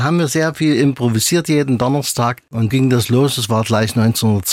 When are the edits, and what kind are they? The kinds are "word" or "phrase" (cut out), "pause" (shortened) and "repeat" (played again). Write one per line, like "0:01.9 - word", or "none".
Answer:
0:02.7 - word